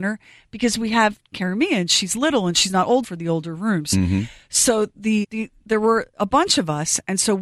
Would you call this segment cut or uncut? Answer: cut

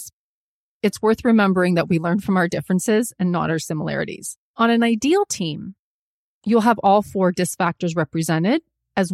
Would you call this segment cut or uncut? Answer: cut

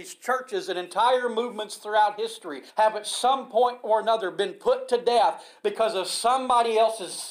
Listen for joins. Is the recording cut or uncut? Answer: cut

